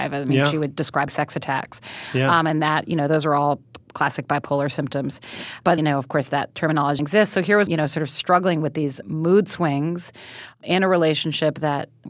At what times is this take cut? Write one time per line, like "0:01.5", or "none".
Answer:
0:01.1
0:05.8
0:07.0
0:07.7
0:09.0